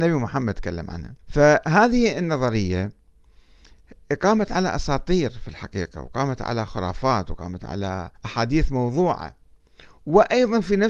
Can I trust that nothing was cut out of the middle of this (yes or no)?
no